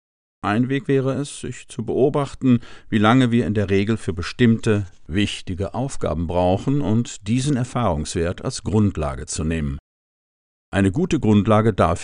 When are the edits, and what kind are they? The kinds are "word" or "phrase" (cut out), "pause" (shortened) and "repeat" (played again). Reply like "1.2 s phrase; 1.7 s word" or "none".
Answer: none